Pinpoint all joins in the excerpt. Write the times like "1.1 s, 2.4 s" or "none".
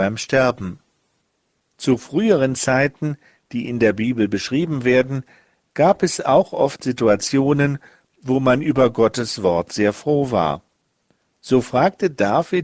none

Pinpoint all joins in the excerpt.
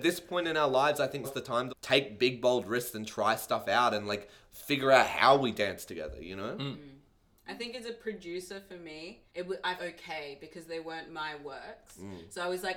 1.2 s, 1.7 s, 9.3 s, 9.8 s

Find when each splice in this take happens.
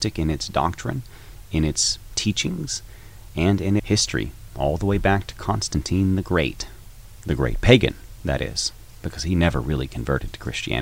3.8 s

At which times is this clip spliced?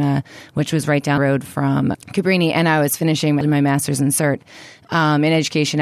1.2 s, 1.9 s, 3.4 s

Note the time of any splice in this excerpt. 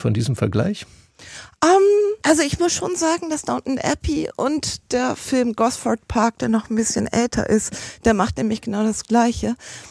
2.2 s

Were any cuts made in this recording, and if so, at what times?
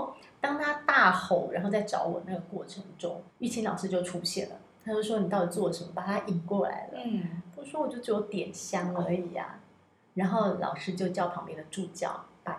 3.3 s

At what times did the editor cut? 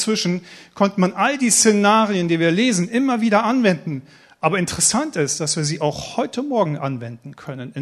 none

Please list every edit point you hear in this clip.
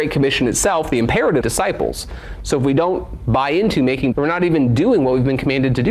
1.4 s, 4.1 s

